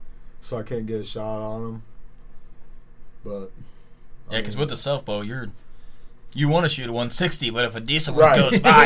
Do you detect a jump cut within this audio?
no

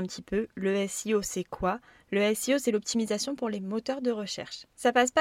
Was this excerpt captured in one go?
yes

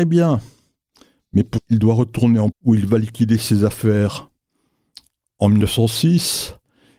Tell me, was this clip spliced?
yes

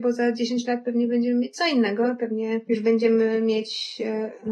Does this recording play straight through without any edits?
yes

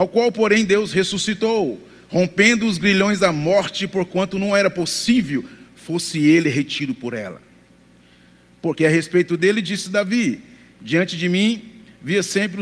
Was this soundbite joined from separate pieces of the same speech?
no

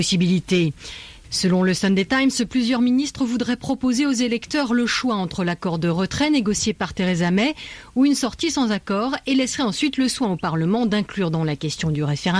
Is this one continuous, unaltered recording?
yes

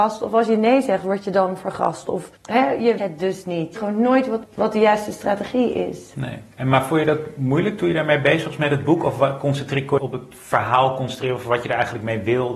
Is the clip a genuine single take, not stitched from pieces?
no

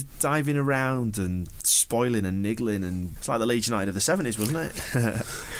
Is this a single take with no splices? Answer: no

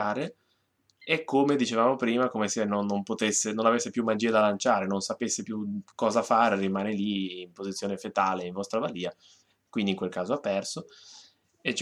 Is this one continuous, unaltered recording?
no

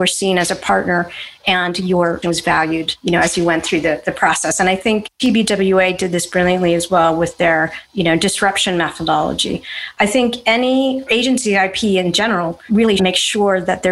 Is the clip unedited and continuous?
no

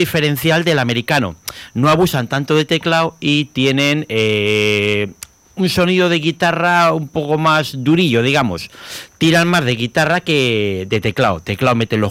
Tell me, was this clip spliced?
no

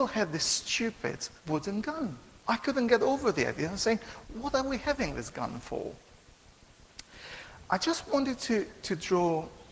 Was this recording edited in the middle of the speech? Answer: yes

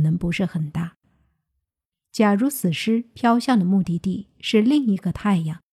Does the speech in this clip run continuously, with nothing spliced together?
yes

